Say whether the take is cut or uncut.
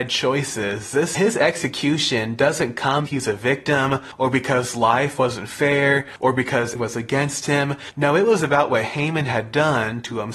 cut